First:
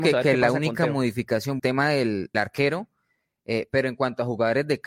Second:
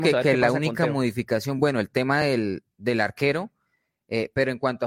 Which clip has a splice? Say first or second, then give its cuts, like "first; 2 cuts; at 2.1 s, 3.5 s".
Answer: first; 2 cuts; at 1.6 s, 2.3 s